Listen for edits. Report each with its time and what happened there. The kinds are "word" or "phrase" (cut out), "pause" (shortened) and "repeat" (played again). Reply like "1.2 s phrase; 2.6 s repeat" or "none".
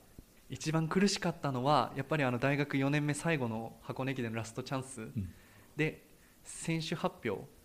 none

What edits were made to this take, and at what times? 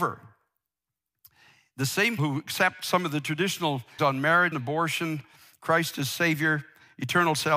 2.2 s word; 4.0 s word; 4.5 s word

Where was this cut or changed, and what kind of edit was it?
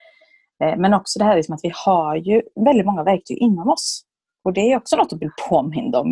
none

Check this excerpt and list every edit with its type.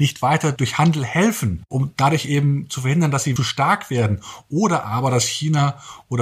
3.4 s phrase

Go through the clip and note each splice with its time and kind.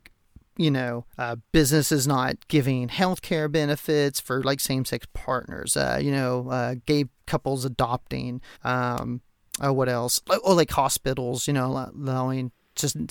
1.1 s pause; 8.5 s pause

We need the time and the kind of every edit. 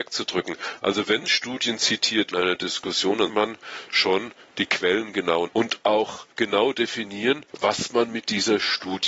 2.3 s phrase; 3.3 s word; 5.5 s word; 6.3 s pause; 7.5 s pause

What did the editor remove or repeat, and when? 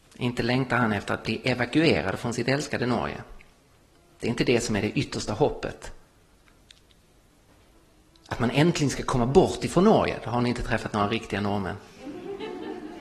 none

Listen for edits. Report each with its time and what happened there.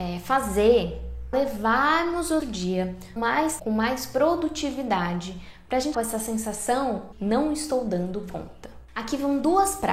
1.3 s word; 2.4 s word; 3.2 s word; 3.6 s word; 5.9 s word; 7.1 s word

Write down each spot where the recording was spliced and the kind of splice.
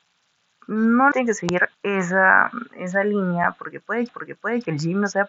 1.1 s word; 1.7 s pause; 4.1 s repeat

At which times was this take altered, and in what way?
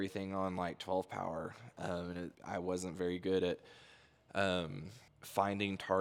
2.3 s pause; 5.1 s pause

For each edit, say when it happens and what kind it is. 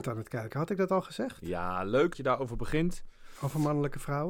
2.1 s word

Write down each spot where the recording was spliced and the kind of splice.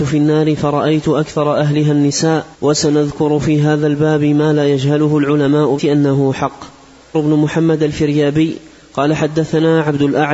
2.5 s pause; 5.8 s word; 7.1 s phrase

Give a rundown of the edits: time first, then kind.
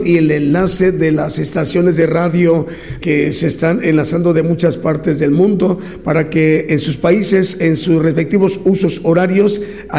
3.0 s word

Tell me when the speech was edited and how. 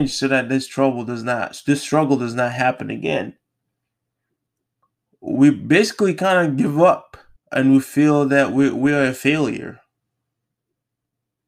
7.4 s pause

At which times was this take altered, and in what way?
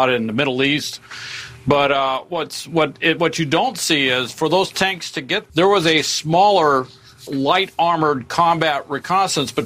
5.5 s word; 7.3 s word

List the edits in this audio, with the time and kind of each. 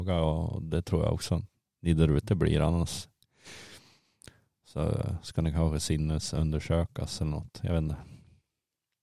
1.7 s pause

